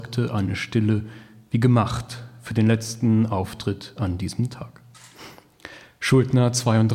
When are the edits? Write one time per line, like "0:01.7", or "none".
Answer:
none